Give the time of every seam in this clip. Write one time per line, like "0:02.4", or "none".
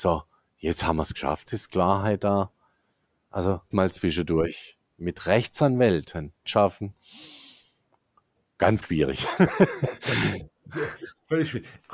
0:01.5
0:03.7
0:06.4
0:08.8